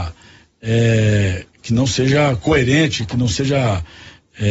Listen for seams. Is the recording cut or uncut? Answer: uncut